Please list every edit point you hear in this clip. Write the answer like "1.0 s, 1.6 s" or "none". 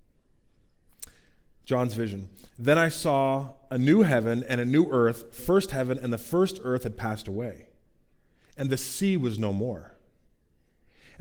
5.4 s

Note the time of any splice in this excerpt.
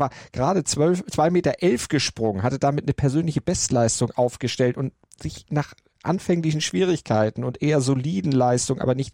none

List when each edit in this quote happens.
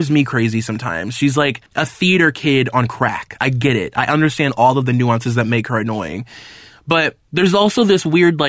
1.7 s, 7.2 s

